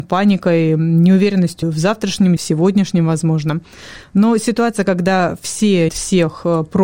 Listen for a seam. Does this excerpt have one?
yes; 3 cuts; at 1.6 s, 2.4 s, 5.9 s

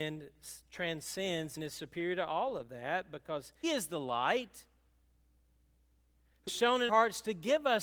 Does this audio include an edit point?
yes; 4 cuts; at 1.6 s, 3.6 s, 6.5 s, 6.9 s

